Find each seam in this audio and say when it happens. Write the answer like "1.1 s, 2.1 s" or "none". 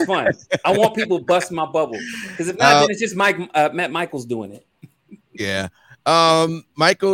none